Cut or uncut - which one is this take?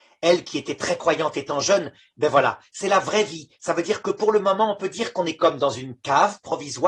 uncut